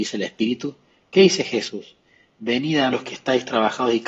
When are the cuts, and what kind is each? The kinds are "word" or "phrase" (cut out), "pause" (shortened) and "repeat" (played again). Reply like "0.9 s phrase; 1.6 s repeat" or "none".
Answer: 2.9 s phrase